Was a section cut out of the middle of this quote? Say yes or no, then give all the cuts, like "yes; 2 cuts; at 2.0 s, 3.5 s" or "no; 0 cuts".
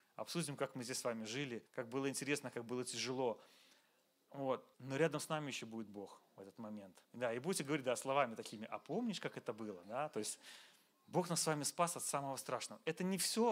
yes; 4 cuts; at 1.7 s, 4.7 s, 7.0 s, 10.9 s